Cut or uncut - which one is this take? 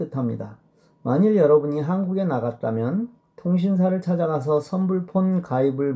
uncut